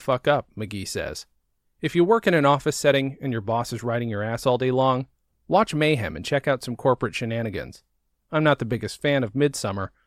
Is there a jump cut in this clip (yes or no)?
no